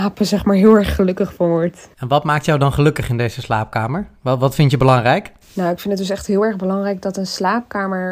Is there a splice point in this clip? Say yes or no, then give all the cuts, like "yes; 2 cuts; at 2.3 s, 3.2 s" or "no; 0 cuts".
yes; 2 cuts; at 1.9 s, 5.4 s